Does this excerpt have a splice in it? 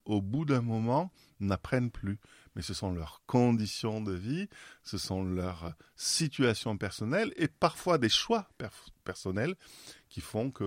no; 0 cuts

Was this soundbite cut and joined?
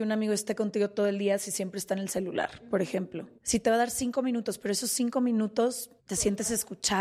yes; 2 cuts; at 3.4 s, 6.0 s

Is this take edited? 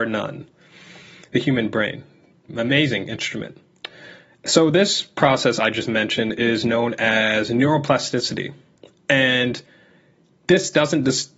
yes; 1 cut; at 3.0 s

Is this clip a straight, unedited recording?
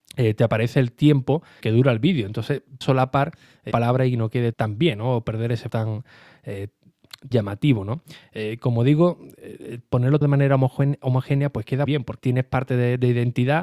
no; 9 cuts; at 1.6 s, 2.8 s, 3.7 s, 4.5 s, 5.7 s, 7.3 s, 10.2 s, 11.8 s, 12.2 s

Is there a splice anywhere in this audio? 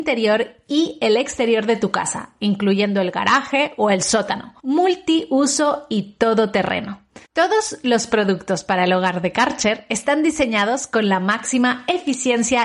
yes; 2 cuts; at 4.6 s, 7.2 s

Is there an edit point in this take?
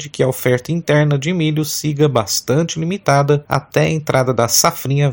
no; 0 cuts

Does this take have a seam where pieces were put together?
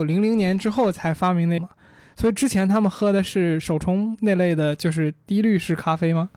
yes; 1 cut; at 1.6 s

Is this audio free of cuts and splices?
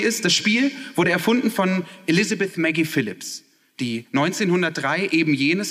yes; 0 cuts

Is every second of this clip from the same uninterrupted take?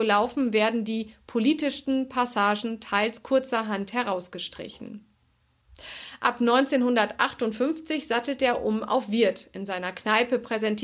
yes; 0 cuts

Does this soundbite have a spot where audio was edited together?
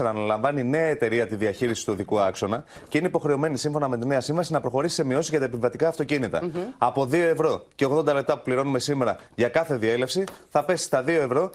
no; 0 cuts

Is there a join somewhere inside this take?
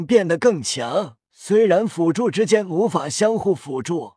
yes; 1 cut; at 1.2 s

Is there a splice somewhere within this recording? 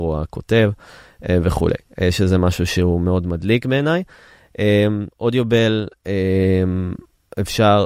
yes; 1 cut; at 5.1 s

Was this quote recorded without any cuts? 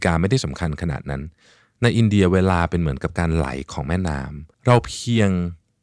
no; 1 cut; at 4.5 s

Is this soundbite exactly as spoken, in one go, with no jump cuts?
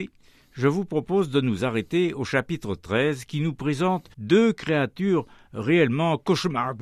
no; 1 cut; at 4.1 s

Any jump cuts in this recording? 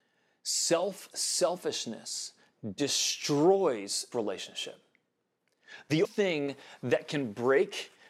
yes; 3 cuts; at 1.1 s, 4.1 s, 6.0 s

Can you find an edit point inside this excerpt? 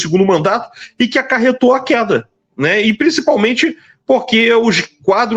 no; 0 cuts

